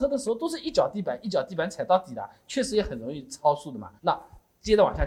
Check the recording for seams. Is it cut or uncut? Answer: cut